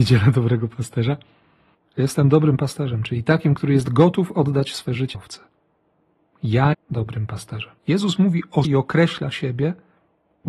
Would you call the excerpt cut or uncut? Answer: cut